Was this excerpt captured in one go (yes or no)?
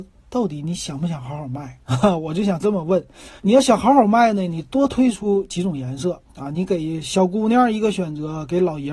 no